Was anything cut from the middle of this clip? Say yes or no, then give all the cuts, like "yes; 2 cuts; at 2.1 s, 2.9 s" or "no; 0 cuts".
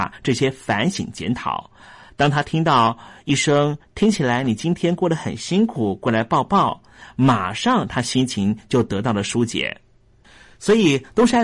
no; 0 cuts